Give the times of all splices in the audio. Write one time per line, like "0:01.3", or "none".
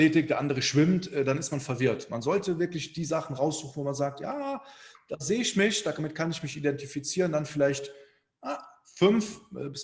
none